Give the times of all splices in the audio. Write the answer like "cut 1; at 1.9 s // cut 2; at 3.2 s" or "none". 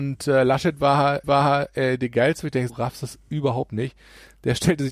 cut 1; at 1.2 s // cut 2; at 2.7 s

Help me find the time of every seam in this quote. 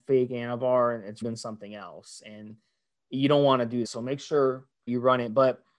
cut 1; at 1.2 s // cut 2; at 3.8 s // cut 3; at 4.9 s

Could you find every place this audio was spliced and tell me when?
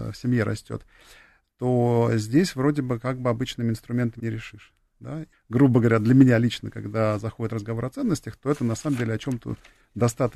cut 1; at 4.2 s // cut 2; at 5.3 s

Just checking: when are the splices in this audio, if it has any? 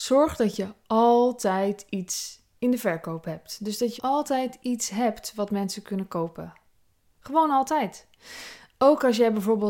cut 1; at 4.0 s

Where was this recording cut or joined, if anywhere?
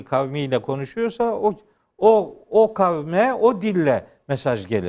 none

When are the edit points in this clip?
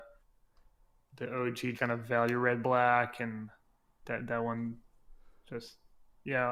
cut 1; at 1.7 s

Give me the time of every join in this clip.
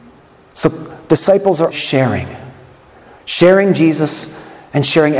cut 1; at 1.7 s

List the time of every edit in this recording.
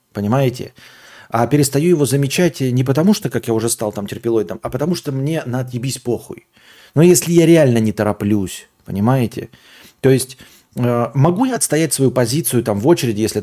none

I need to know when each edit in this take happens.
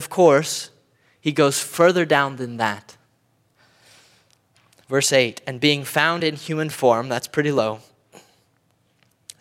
none

